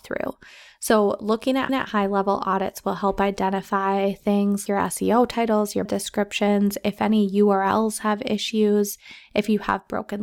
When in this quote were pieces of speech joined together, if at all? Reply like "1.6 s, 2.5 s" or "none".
1.7 s, 4.7 s, 5.9 s

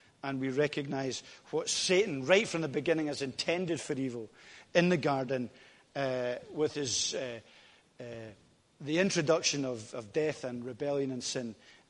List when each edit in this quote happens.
none

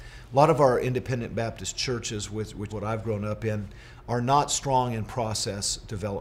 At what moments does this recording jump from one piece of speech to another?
2.7 s

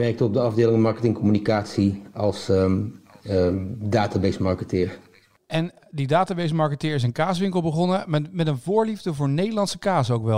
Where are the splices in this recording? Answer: none

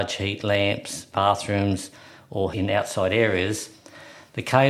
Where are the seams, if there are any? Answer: 1.1 s, 2.5 s

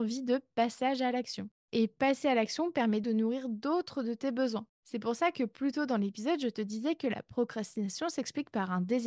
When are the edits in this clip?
3.0 s

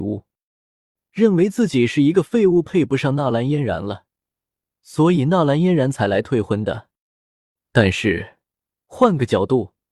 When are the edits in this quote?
none

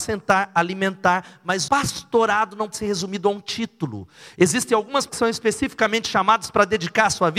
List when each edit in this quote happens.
1.7 s, 2.7 s, 5.1 s

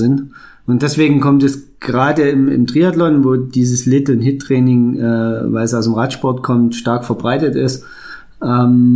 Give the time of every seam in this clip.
none

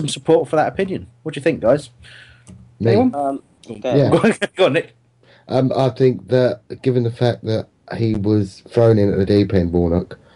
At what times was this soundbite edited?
none

